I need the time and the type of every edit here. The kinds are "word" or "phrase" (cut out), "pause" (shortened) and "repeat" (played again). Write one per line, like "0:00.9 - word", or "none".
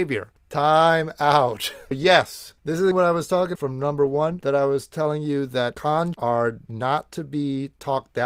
0:01.9 - word
0:02.9 - word
0:03.6 - word
0:06.1 - word